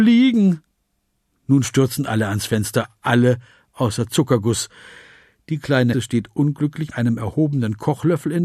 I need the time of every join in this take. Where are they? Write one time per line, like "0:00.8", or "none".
0:05.9
0:06.9